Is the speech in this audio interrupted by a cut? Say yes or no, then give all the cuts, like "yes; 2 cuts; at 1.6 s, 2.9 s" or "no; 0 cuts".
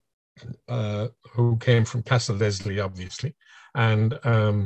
no; 0 cuts